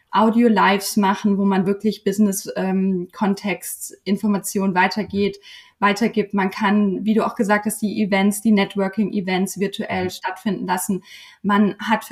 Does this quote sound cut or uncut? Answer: uncut